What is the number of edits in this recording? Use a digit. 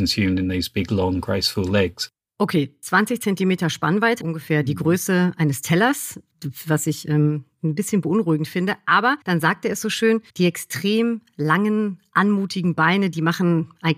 4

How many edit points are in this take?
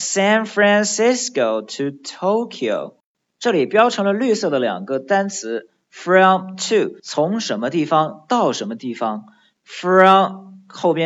1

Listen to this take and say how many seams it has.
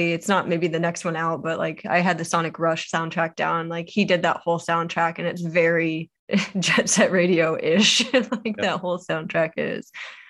1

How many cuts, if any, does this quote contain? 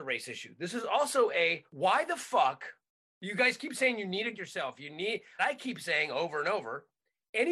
4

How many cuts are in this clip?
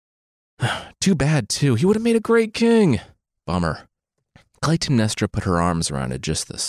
0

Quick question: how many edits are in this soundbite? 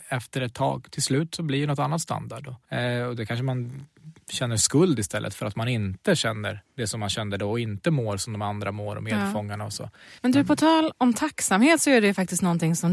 3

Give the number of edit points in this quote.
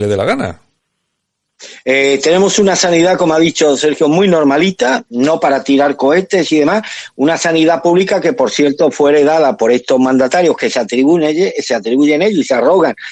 0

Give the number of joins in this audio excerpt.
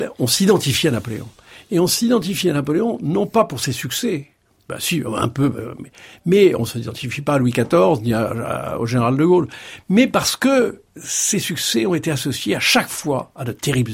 0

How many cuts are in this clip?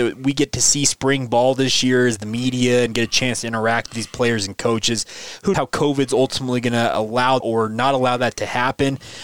2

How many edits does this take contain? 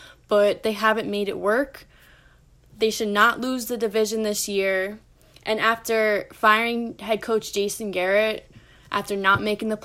0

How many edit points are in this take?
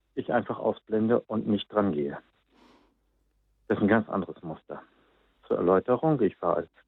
0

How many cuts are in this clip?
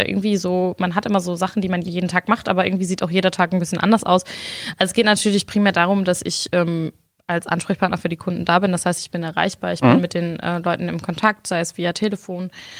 1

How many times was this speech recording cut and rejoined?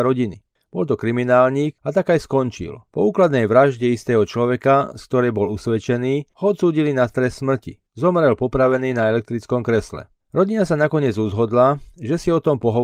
5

